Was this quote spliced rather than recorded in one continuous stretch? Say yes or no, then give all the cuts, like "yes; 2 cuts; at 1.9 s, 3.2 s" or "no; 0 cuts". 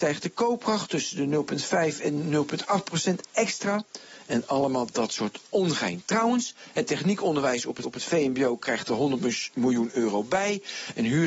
yes; 1 cut; at 7.8 s